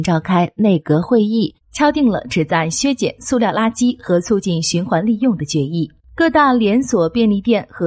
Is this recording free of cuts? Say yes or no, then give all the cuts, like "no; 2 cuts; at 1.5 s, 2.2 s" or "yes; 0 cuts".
no; 1 cut; at 1.6 s